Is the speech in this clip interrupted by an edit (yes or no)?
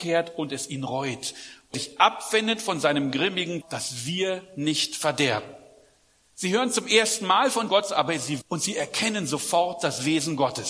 yes